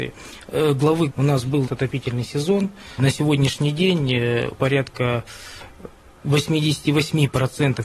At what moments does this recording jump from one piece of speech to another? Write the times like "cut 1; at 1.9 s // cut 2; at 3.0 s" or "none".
cut 1; at 1.1 s // cut 2; at 1.7 s // cut 3; at 3.0 s // cut 4; at 4.5 s